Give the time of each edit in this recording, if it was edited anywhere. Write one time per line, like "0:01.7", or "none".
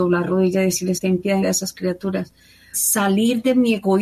0:01.0
0:01.4
0:02.7